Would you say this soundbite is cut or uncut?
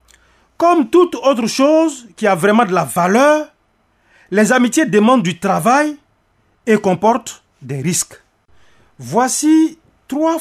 uncut